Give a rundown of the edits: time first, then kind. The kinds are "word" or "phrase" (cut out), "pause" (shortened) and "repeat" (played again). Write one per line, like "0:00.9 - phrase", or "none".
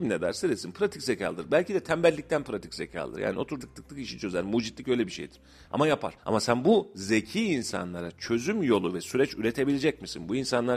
0:03.6 - word
0:06.2 - pause

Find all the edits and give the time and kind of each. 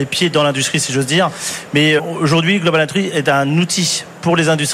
0:02.0 - word

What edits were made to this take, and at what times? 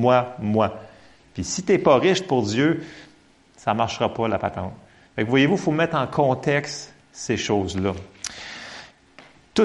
none

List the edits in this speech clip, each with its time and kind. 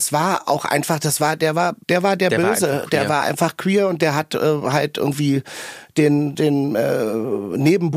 0:01.8 - pause

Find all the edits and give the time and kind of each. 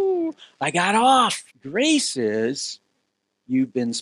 0:01.5 - pause

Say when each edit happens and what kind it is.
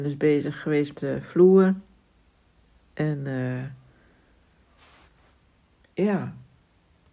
0:00.9 - word

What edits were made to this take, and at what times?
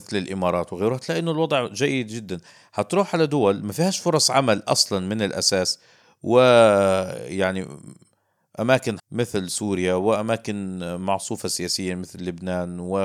0:09.0 - word

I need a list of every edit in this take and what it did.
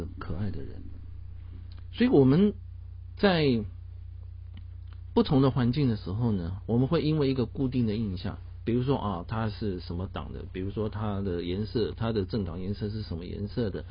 0:06.6 - word

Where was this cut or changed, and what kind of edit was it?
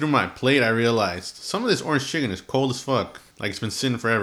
0:03.3 - pause

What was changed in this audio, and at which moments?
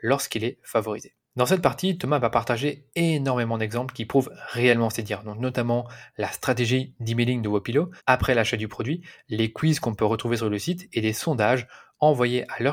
0:01.2 - pause
0:08.0 - pause

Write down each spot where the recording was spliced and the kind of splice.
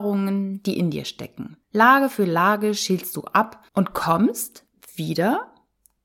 0:01.6 - pause
0:03.7 - pause

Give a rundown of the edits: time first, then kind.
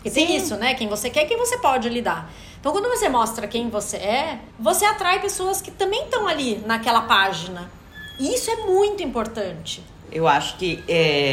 0:04.5 - pause

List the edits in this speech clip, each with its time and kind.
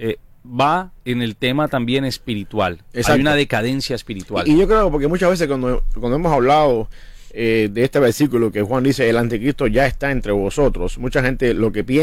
0:01.0 - pause

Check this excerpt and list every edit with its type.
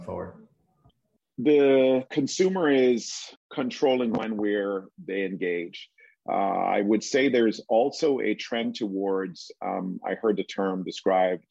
0:03.4 - pause

